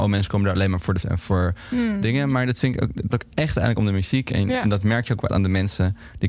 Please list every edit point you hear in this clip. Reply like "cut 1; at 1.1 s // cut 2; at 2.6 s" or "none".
cut 1; at 1.0 s // cut 2; at 3.1 s // cut 3; at 5.3 s

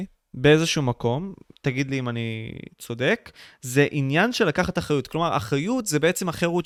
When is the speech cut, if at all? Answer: none

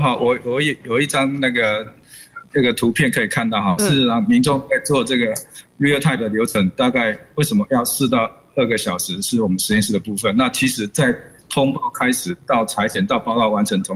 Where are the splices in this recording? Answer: cut 1; at 6.2 s

